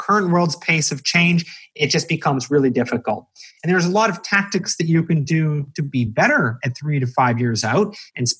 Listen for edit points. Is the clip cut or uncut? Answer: uncut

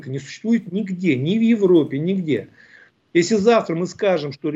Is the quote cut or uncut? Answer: uncut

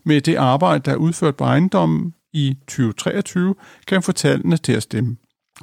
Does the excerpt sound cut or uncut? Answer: uncut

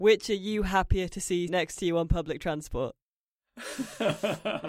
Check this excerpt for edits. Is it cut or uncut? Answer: cut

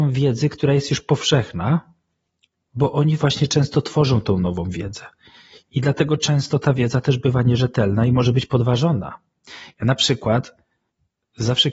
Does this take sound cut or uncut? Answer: uncut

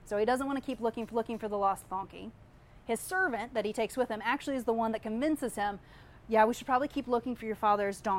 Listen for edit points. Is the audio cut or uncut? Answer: cut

